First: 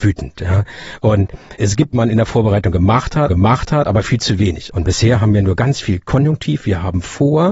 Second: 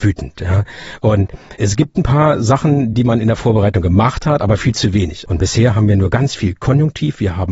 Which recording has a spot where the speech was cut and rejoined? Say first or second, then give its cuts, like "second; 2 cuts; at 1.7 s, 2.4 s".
first; 2 cuts; at 1.9 s, 3.3 s